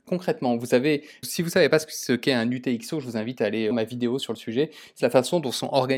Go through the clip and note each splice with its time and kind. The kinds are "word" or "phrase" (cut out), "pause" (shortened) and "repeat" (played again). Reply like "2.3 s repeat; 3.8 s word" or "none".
1.2 s word; 3.7 s word; 5.0 s word